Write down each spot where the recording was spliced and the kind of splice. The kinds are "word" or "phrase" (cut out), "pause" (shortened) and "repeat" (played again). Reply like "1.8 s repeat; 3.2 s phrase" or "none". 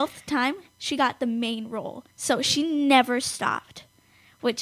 2.1 s pause